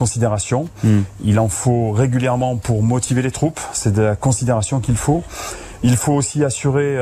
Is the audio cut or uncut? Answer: uncut